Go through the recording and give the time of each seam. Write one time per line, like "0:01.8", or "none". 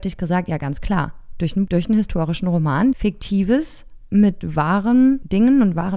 0:01.7
0:02.9

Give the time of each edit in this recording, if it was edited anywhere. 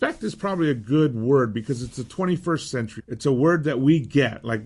0:03.0

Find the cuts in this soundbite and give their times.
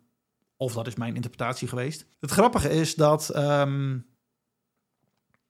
0:02.1

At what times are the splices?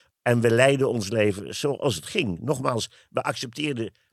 none

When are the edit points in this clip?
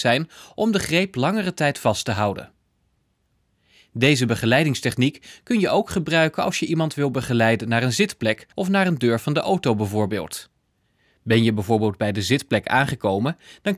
0:08.5

